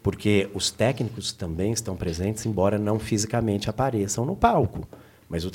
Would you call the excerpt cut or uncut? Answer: uncut